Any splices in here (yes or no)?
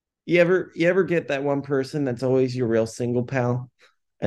no